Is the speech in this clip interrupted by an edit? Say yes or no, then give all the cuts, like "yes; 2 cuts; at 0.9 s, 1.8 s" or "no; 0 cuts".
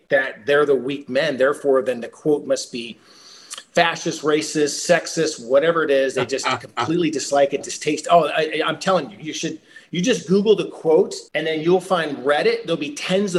yes; 1 cut; at 11.3 s